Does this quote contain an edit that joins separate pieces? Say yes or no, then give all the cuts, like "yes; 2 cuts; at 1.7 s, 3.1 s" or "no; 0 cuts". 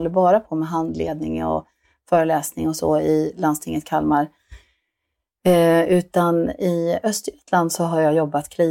no; 0 cuts